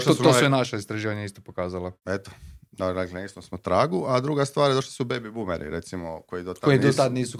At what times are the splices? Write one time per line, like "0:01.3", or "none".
0:02.0